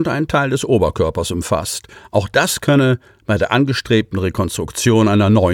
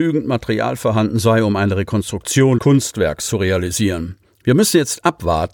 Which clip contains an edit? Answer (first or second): second